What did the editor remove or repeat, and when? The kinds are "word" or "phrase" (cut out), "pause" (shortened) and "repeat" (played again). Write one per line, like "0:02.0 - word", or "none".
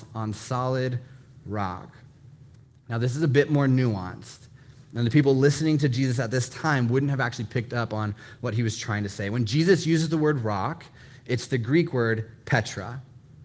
none